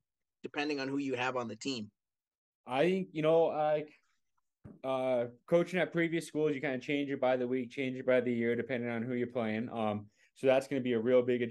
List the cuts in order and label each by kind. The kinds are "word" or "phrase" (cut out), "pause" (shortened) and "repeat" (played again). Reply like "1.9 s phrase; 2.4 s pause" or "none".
none